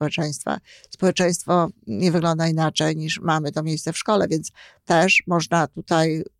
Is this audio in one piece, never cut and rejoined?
yes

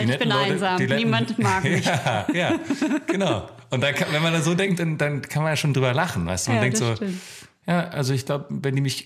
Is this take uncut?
yes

